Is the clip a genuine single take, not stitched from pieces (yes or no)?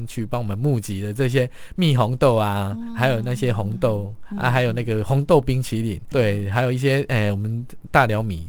no